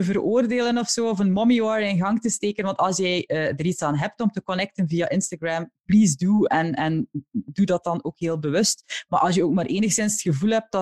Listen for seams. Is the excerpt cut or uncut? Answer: uncut